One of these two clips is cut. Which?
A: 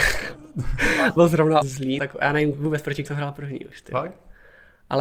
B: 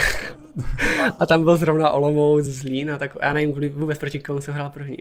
A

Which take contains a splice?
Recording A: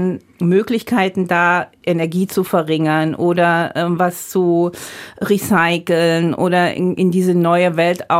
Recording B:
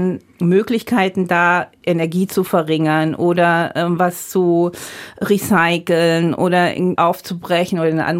B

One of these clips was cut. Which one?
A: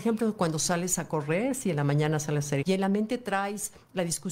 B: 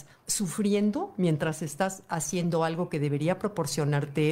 A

